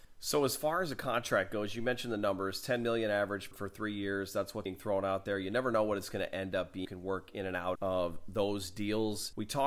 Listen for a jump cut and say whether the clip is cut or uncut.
cut